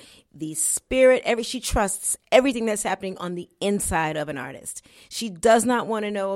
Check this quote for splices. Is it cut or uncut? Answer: uncut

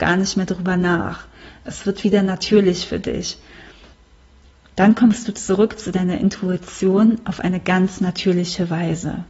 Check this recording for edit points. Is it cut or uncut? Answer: uncut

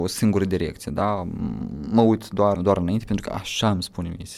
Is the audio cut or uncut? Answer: cut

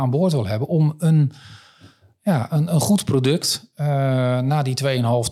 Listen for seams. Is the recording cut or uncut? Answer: uncut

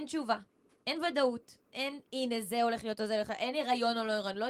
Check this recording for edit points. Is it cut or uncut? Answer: cut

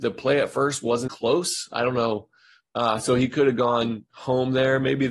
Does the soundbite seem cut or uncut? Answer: cut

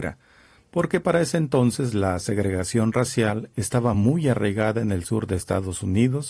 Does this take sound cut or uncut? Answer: uncut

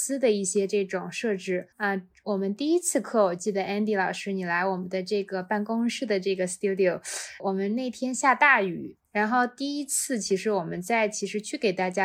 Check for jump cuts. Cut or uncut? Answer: cut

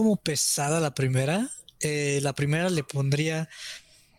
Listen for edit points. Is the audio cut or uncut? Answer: uncut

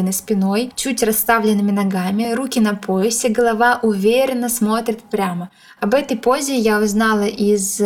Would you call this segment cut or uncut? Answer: uncut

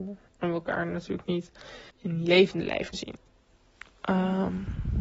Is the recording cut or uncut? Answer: cut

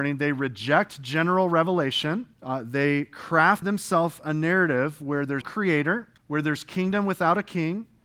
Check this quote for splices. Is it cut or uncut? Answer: cut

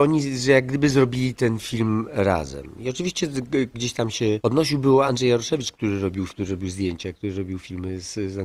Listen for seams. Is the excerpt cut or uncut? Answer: cut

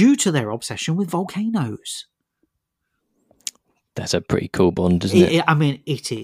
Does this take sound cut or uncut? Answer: uncut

